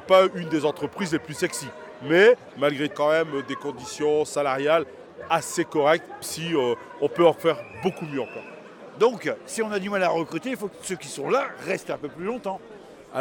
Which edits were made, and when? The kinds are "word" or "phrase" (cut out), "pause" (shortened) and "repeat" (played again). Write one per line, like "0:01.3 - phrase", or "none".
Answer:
0:02.9 - phrase
0:06.2 - word
0:10.7 - phrase

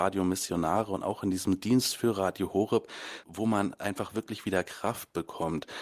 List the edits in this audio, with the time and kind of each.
0:03.2 - word

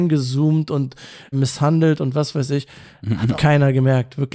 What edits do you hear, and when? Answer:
0:01.3 - word
0:03.3 - word

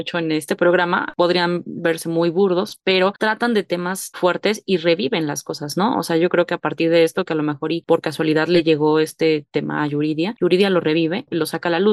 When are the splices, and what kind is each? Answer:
0:04.1 - word

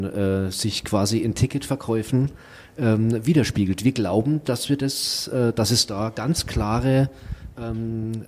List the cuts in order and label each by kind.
none

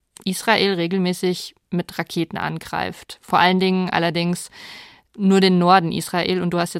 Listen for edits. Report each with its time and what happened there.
none

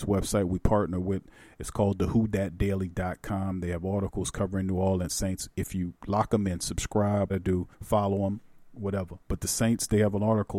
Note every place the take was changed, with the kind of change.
0:07.3 - phrase
0:07.7 - pause
0:09.2 - pause

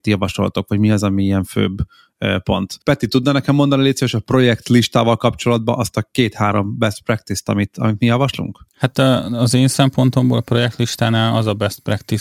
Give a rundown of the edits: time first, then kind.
0:02.8 - pause
0:08.7 - pause

